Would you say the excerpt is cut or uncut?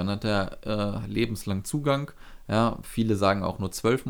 uncut